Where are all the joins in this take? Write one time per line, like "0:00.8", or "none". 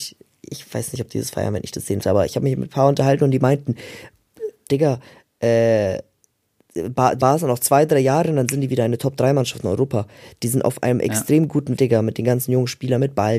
0:02.0
0:04.7
0:07.2
0:11.8